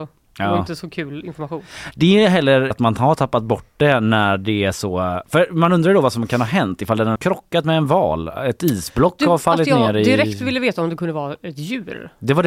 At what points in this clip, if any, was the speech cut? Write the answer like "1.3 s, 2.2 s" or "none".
2.7 s, 7.2 s